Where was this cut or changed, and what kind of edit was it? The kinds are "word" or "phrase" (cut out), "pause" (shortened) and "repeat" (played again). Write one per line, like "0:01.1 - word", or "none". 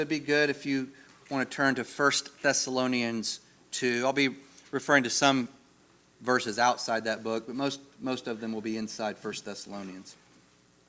none

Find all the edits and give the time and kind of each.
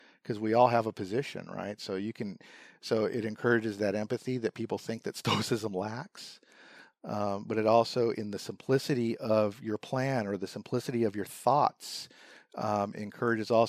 none

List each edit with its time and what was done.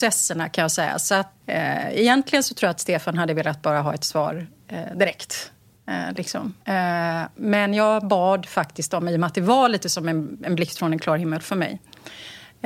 0:01.4 - word
0:06.6 - pause

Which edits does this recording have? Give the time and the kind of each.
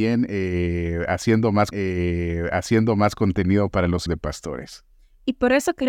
0:01.7 - repeat
0:04.1 - word

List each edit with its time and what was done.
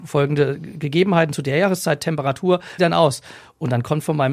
0:02.8 - phrase

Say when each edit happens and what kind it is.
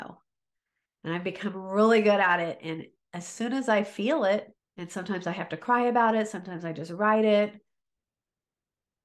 0:04.6 - pause

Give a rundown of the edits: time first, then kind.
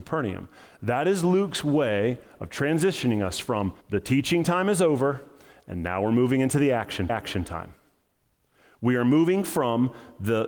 0:03.8 - pause
0:07.1 - repeat

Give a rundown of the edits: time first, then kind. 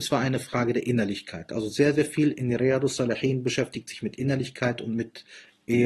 none

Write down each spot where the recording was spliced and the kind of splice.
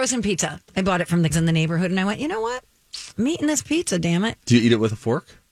0:01.3 - word
0:03.1 - pause
0:04.4 - pause

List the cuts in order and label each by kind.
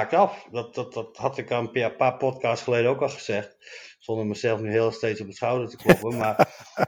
none

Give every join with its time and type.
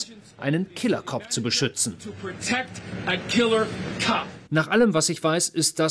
0:04.5 - pause

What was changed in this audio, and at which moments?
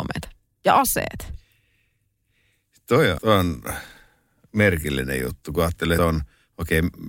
0:03.2 - word
0:06.0 - phrase

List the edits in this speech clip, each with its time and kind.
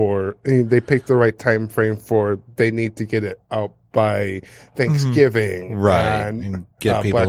none

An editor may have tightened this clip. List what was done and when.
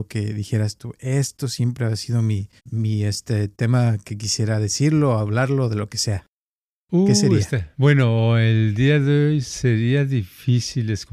0:02.6 - pause
0:07.7 - pause

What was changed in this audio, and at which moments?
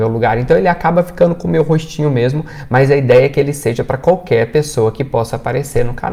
none

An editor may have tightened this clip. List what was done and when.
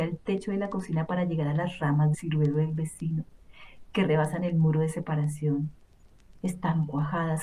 0:02.1 - word

